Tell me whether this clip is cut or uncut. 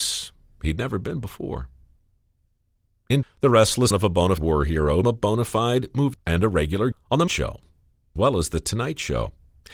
cut